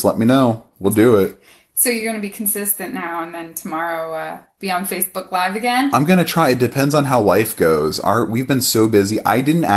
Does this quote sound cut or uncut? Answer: uncut